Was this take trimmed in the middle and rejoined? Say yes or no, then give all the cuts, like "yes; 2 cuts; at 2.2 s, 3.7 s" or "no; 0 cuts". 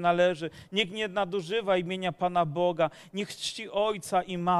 no; 0 cuts